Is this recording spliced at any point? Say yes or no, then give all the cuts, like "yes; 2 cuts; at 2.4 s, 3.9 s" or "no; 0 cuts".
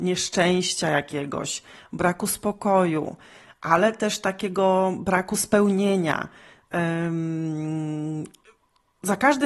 no; 0 cuts